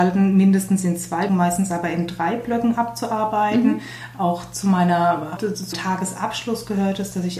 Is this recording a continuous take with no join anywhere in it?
no; 3 cuts; at 1.3 s, 5.4 s, 5.7 s

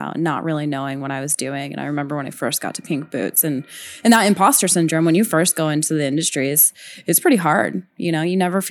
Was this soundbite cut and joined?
no; 0 cuts

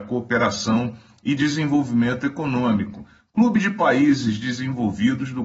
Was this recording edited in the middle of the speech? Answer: no; 0 cuts

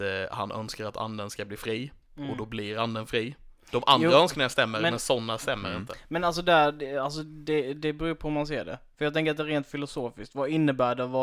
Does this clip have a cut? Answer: no; 0 cuts

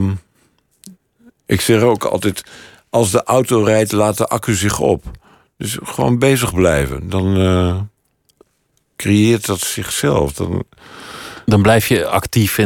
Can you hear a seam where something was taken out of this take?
no; 0 cuts

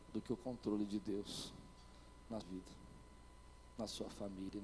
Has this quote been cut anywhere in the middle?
yes; 1 cut; at 2.4 s

